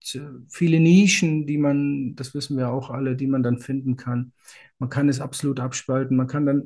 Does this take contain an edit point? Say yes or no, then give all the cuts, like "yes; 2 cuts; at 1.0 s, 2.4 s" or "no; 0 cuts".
no; 0 cuts